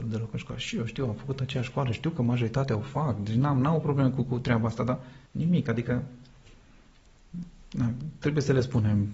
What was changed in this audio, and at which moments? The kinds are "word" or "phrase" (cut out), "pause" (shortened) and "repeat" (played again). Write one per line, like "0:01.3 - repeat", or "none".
0:05.3 - pause